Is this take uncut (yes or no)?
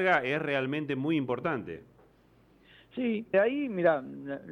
no